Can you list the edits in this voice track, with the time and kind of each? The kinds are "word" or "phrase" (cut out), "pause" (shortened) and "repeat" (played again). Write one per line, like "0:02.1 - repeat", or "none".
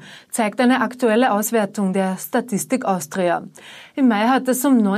none